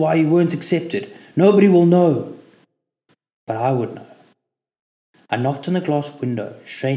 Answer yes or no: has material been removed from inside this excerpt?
no